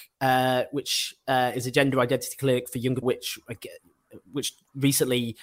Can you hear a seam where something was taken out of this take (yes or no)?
yes